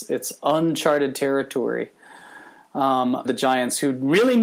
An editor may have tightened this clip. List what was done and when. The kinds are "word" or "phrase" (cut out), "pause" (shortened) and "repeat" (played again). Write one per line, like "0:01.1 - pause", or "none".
0:03.2 - word